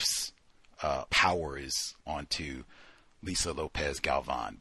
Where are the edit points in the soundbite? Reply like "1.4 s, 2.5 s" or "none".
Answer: 1.1 s, 2.0 s